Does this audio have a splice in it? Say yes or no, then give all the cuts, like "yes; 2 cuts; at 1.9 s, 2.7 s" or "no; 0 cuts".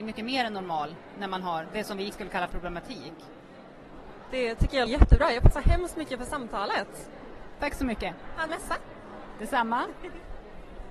yes; 6 cuts; at 1.6 s, 2.1 s, 2.5 s, 4.9 s, 5.5 s, 8.5 s